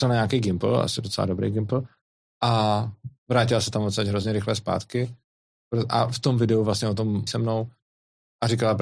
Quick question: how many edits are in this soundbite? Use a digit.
2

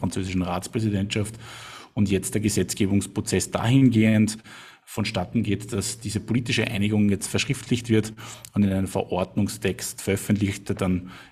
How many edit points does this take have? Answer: 0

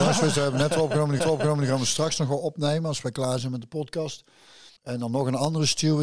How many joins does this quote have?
2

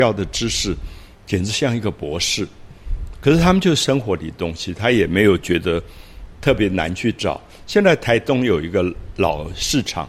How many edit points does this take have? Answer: 1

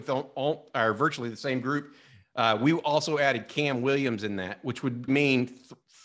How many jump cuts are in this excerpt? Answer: 1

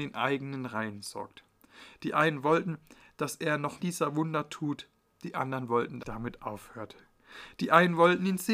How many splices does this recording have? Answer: 2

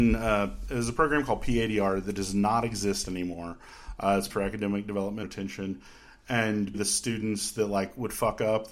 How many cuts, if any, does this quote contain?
3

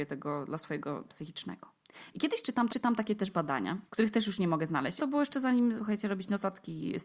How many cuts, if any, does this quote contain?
5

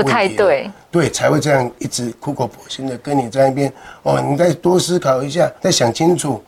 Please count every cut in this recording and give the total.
1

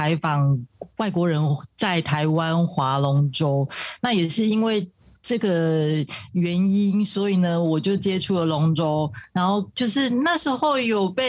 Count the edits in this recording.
0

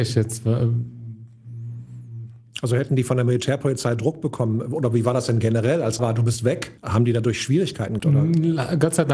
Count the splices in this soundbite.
3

